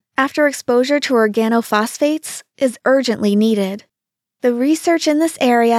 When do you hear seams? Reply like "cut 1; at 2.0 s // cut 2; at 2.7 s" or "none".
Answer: none